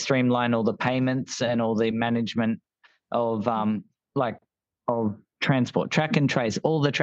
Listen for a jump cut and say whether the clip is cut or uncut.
uncut